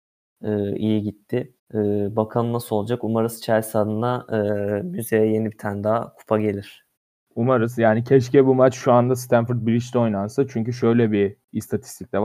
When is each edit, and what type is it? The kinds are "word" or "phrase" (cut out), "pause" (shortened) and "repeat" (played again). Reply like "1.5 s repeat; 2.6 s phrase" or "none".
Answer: 1.6 s pause; 7.0 s pause